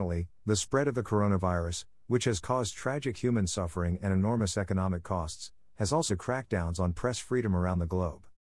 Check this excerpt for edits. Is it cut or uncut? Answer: cut